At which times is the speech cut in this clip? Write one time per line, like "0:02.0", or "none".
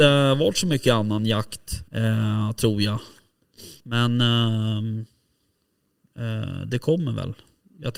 0:01.9
0:03.8